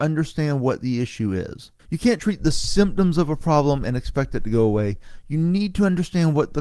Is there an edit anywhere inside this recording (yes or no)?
yes